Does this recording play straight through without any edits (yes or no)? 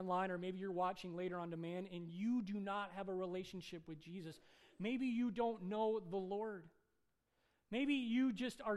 yes